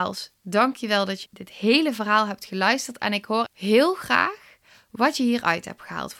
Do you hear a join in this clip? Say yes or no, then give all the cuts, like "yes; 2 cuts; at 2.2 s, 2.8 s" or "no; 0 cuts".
yes; 2 cuts; at 1.2 s, 3.4 s